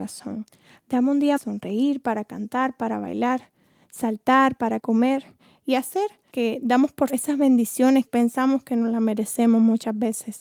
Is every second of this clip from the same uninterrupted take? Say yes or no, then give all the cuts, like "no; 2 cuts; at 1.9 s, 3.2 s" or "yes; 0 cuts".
no; 5 cuts; at 1.4 s, 4.8 s, 6.3 s, 7.1 s, 8.1 s